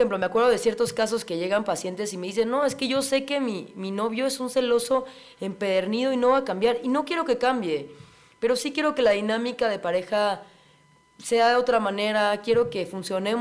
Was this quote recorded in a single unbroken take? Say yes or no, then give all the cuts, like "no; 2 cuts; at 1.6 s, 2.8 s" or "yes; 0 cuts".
yes; 0 cuts